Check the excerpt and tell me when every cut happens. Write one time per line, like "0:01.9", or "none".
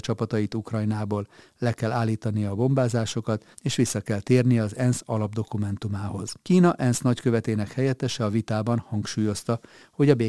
0:03.5
0:06.4